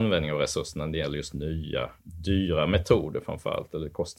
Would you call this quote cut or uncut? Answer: cut